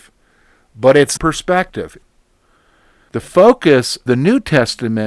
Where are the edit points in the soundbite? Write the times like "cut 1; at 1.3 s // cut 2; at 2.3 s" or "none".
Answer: cut 1; at 1.2 s // cut 2; at 4.1 s